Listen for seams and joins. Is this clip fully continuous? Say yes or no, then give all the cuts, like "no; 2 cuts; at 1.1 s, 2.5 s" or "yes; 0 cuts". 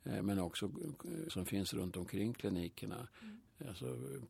no; 1 cut; at 1.3 s